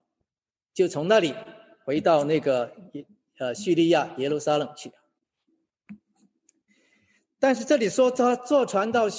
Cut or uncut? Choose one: uncut